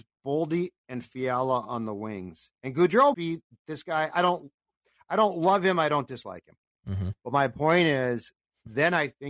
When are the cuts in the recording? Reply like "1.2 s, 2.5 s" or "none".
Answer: 2.5 s, 3.1 s